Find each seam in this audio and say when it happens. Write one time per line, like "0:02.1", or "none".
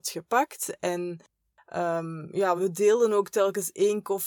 0:02.6